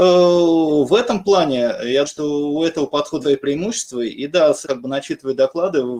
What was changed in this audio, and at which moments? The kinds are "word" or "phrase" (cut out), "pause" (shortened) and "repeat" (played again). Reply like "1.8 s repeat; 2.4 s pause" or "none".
2.0 s word; 3.2 s word; 4.6 s phrase